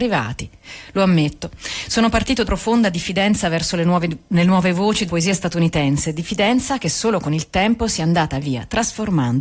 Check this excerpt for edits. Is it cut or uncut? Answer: cut